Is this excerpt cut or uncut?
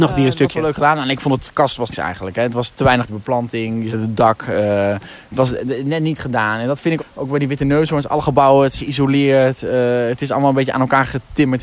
cut